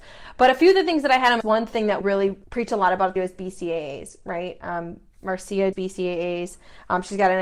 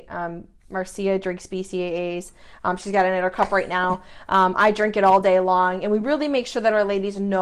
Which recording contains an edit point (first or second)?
first